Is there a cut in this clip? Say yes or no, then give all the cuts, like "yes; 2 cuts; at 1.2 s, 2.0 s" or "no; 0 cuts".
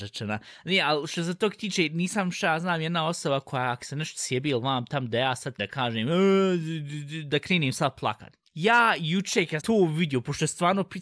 yes; 3 cuts; at 5.6 s, 8.5 s, 9.6 s